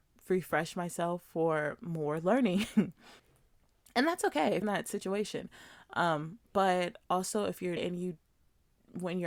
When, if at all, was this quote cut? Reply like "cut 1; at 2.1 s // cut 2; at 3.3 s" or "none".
cut 1; at 3.2 s // cut 2; at 4.6 s // cut 3; at 6.4 s // cut 4; at 7.8 s